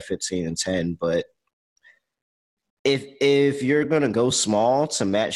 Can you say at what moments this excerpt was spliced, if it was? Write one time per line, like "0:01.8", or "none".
none

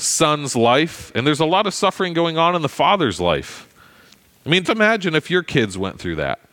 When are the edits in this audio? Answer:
0:04.6

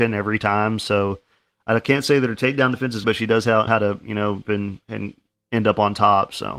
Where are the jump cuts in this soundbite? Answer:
0:03.0
0:03.7
0:04.4

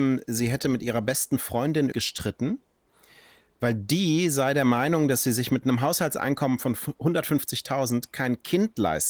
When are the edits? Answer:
0:01.9
0:05.6

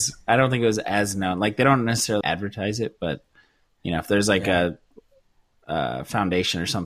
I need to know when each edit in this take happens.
0:02.2

